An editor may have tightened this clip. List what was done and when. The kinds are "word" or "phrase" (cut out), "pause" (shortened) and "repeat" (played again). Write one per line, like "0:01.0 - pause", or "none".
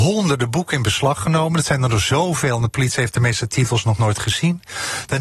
none